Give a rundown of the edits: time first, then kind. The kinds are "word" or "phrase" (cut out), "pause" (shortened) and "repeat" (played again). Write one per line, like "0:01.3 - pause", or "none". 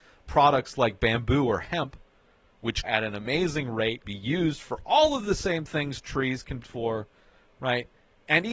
0:02.8 - word
0:04.0 - word
0:06.6 - word